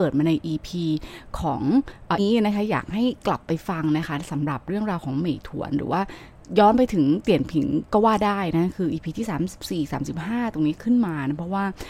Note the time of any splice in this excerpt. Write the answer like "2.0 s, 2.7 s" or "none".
2.2 s

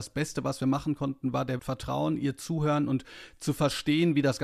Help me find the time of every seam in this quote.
1.6 s

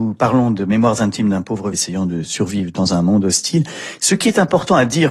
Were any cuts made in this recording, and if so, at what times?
1.7 s

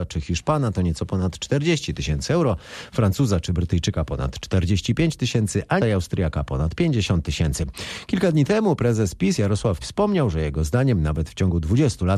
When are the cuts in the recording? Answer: 5.8 s, 9.8 s

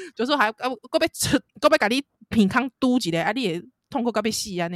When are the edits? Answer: 1.5 s

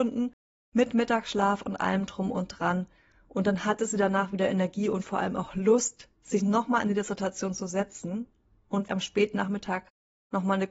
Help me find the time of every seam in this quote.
8.9 s

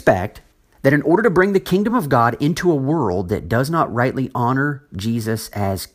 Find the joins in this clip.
none

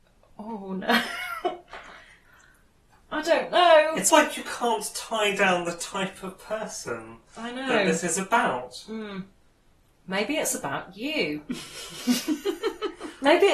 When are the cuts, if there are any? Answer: 4.1 s

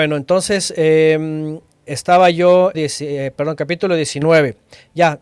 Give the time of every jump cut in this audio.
1.7 s, 2.7 s

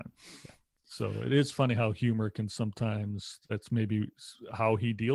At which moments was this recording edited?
none

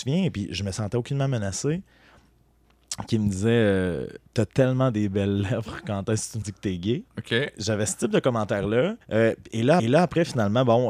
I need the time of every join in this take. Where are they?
4.3 s, 6.4 s, 7.1 s, 9.0 s, 9.8 s

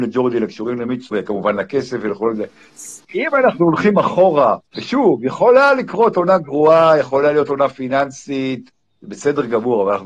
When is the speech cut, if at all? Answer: 1.1 s, 3.0 s, 4.7 s

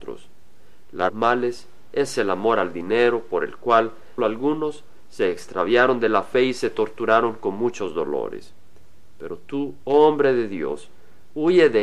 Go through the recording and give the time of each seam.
1.1 s, 4.2 s

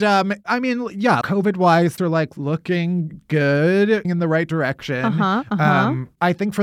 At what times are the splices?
1.2 s, 2.0 s, 4.0 s

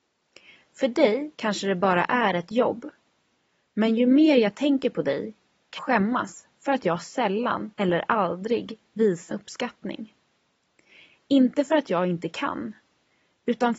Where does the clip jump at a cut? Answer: 1.3 s, 5.8 s, 7.7 s, 9.3 s

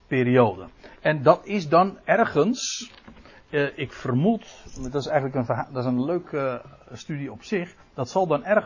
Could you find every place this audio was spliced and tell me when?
none

